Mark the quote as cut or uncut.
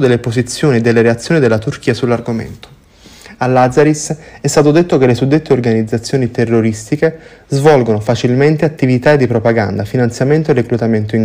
uncut